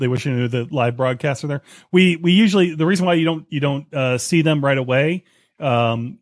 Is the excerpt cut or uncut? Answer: uncut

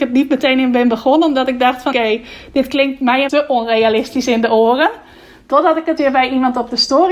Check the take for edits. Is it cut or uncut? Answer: cut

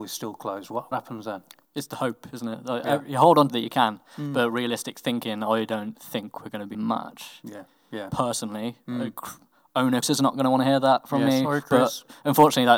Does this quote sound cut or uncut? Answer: cut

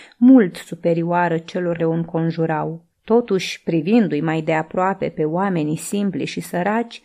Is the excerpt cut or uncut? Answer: cut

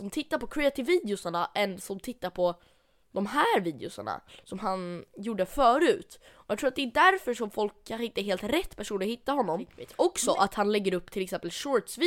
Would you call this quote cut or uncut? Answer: uncut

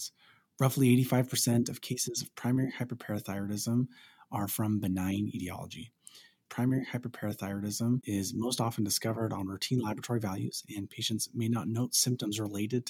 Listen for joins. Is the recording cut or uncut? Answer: uncut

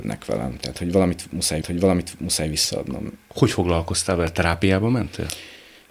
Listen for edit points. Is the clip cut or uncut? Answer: cut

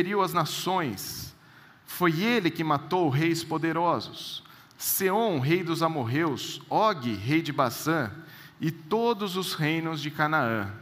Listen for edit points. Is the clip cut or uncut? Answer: uncut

